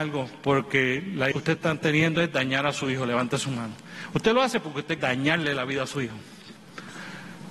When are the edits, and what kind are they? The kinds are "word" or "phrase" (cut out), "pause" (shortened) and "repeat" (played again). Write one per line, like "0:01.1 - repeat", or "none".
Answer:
0:01.3 - word
0:05.0 - word

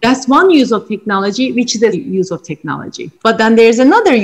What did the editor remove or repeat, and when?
0:01.9 - word
0:03.2 - pause

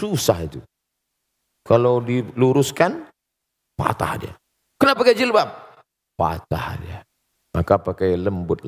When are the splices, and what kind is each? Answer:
0:05.0 - word

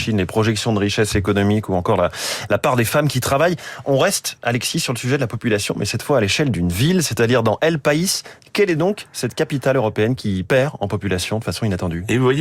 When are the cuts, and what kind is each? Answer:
none

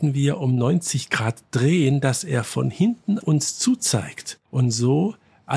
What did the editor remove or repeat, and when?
0:03.2 - word
0:04.5 - pause

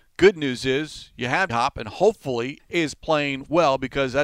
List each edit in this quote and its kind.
0:01.5 - word
0:02.6 - word

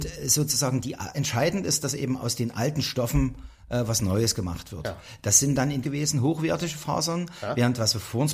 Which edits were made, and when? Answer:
0:01.1 - word
0:05.8 - phrase

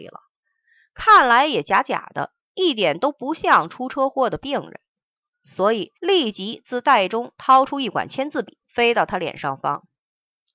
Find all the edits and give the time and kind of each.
0:06.0 - pause
0:08.6 - pause

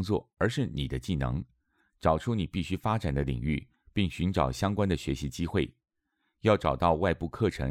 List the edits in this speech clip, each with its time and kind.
none

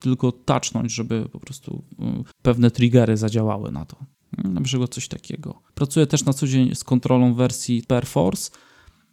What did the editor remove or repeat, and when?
0:02.3 - pause
0:04.1 - pause
0:05.7 - pause
0:06.8 - word
0:07.8 - word

